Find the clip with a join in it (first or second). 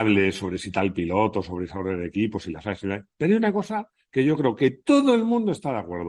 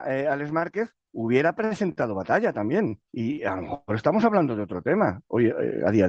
second